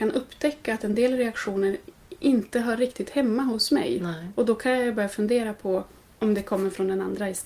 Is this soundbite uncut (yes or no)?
yes